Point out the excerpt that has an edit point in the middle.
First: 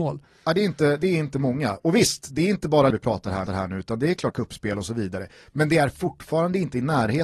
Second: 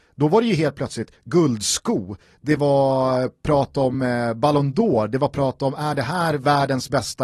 first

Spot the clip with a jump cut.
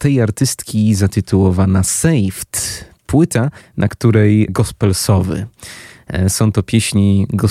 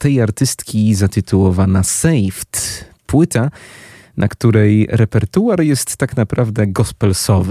first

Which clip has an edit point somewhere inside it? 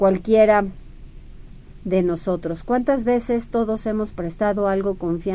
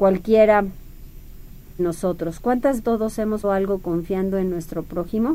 second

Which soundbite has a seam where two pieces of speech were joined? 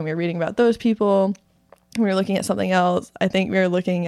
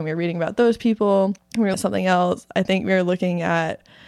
second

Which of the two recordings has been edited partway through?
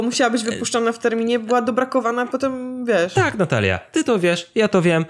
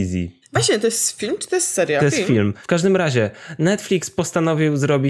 second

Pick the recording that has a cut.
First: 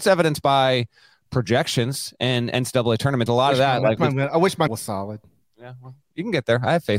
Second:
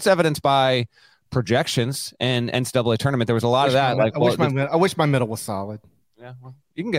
first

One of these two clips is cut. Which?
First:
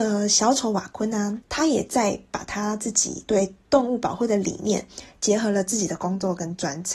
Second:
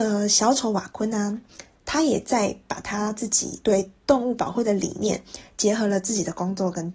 first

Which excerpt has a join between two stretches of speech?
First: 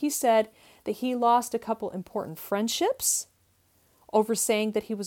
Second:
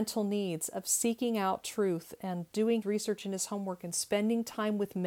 second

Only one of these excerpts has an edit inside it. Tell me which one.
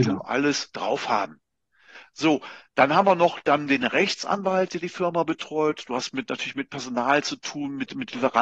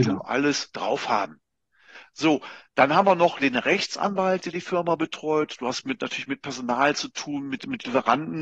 second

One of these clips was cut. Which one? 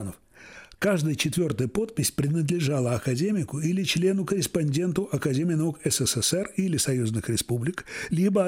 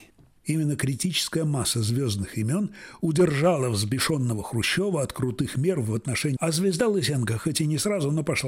second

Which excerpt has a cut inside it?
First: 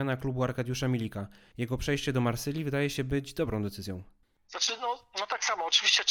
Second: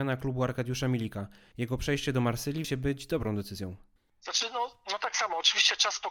second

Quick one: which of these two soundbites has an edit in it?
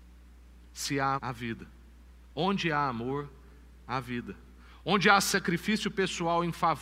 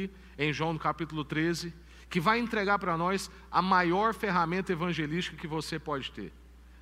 first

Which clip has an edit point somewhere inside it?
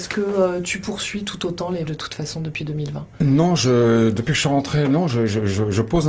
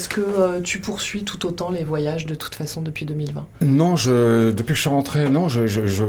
first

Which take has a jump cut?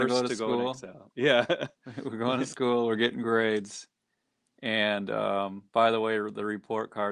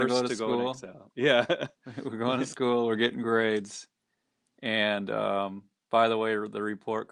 first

